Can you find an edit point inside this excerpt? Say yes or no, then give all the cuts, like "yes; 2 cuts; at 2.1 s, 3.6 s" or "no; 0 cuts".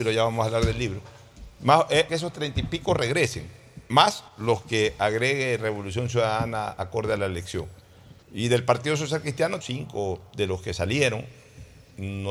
yes; 4 cuts; at 2.1 s, 4.3 s, 8.2 s, 9.6 s